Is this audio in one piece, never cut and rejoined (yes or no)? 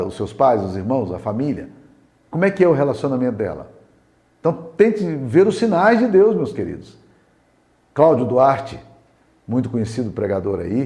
yes